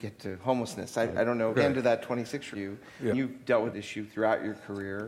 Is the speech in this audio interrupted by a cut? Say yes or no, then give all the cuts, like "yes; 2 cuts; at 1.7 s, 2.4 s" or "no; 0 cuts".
yes; 4 cuts; at 1.5 s, 2.5 s, 3.1 s, 3.7 s